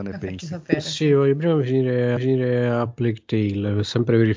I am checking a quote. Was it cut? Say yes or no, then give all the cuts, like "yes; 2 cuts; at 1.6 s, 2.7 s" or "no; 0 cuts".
yes; 1 cut; at 2.2 s